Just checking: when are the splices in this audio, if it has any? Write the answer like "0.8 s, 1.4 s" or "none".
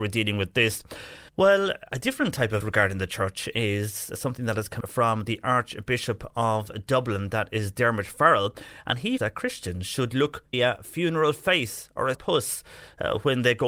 1.3 s, 2.6 s, 4.8 s, 9.2 s, 10.5 s, 12.1 s